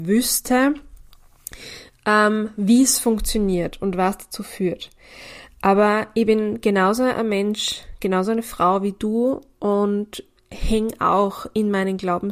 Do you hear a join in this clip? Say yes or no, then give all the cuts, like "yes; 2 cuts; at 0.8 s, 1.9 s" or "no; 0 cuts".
no; 0 cuts